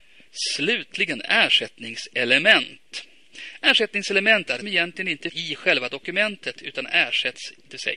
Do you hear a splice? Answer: yes; 2 cuts; at 4.6 s, 5.3 s

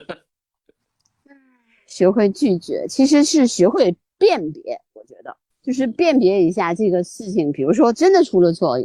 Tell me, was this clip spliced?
yes; 1 cut; at 5.5 s

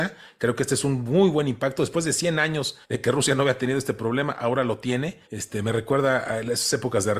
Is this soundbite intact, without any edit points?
no; 2 cuts; at 2.8 s, 5.2 s

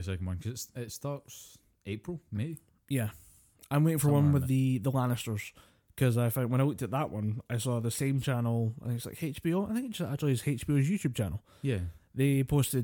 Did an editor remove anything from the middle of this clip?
no; 0 cuts

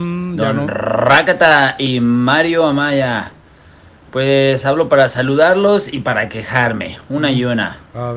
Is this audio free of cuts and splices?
yes; 0 cuts

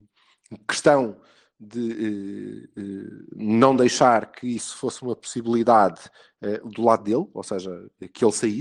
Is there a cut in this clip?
no; 0 cuts

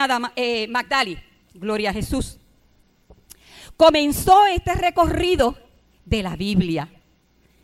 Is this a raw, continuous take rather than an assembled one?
yes; 0 cuts

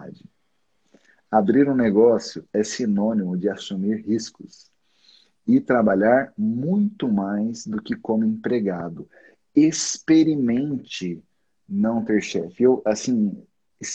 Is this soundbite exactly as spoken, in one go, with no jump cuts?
yes; 0 cuts

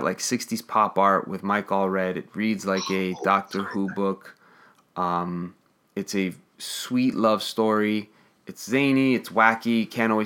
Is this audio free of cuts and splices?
yes; 0 cuts

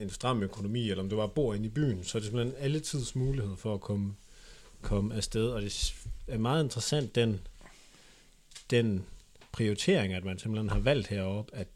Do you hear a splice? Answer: no; 0 cuts

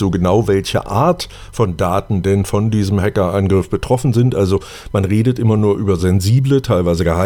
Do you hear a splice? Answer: no; 0 cuts

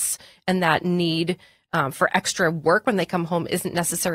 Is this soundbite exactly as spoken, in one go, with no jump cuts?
yes; 0 cuts

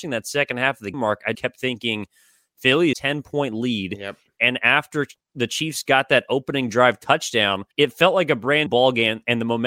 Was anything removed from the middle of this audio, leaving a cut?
yes; 5 cuts; at 0.9 s, 1.3 s, 2.9 s, 7.7 s, 8.7 s

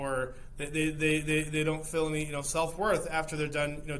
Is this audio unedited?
yes; 0 cuts

